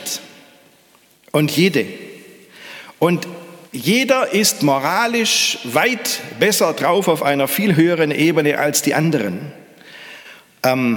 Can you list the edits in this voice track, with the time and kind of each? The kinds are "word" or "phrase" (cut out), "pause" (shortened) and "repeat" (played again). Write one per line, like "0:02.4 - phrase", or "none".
0:03.7 - pause